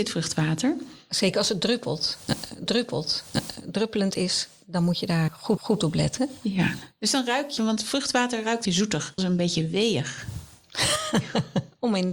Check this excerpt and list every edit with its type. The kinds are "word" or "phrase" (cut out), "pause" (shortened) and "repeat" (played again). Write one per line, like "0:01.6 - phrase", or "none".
0:02.7 - repeat
0:05.6 - repeat
0:07.6 - word
0:08.7 - word
0:09.2 - phrase